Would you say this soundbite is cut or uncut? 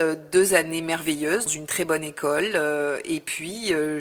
cut